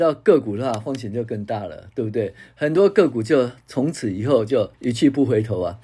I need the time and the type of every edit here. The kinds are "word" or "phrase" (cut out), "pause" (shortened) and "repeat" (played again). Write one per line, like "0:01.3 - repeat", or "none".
0:04.7 - pause

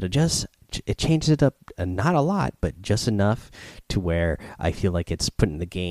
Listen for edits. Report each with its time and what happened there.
none

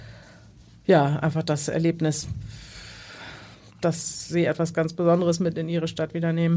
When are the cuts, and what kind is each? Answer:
none

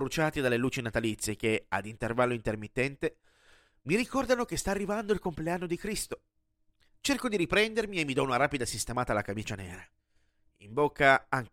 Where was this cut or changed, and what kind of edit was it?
none

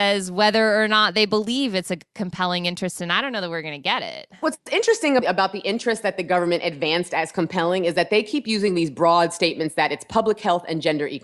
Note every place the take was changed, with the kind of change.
0:05.2 - word

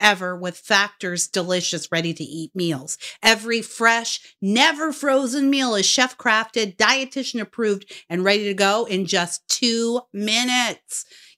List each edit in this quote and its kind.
none

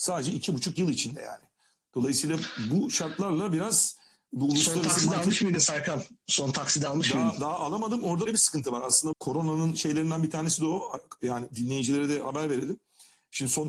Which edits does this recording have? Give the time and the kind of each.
0:08.3 - word
0:09.1 - word

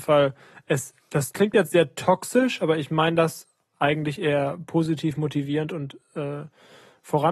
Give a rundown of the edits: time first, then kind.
0:01.0 - pause

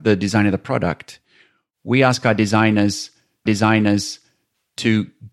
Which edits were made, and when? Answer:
0:03.5 - repeat

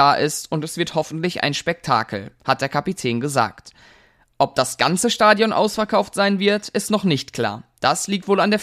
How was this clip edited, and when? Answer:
none

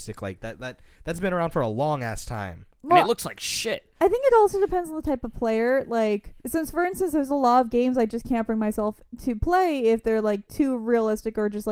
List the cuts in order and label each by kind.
0:03.9 - pause
0:06.4 - pause

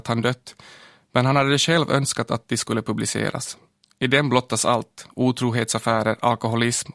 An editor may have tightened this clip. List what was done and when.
none

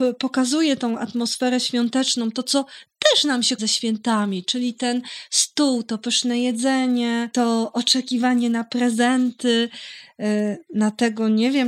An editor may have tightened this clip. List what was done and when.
0:03.6 - word

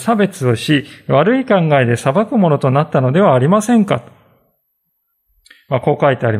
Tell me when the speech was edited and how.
none

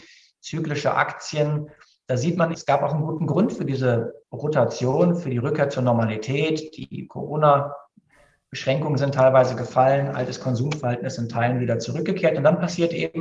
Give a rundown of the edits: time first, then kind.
0:02.5 - word
0:04.2 - pause

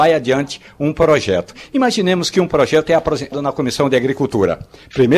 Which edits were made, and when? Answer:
0:03.3 - word

